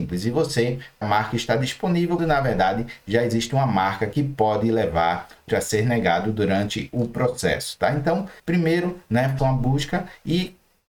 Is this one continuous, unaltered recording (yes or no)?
no